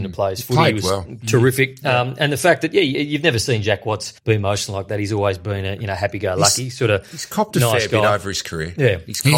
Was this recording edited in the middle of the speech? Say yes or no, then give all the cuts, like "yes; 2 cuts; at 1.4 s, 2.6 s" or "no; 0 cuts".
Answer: yes; 1 cut; at 4.2 s